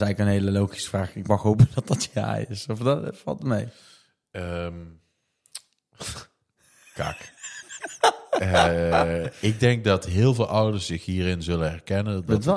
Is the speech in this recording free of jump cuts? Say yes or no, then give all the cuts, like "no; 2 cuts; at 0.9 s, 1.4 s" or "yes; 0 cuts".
yes; 0 cuts